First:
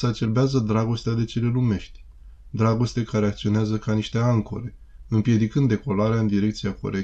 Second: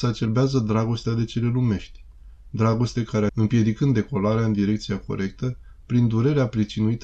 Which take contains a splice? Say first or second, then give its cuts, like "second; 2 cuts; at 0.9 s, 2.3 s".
second; 1 cut; at 3.3 s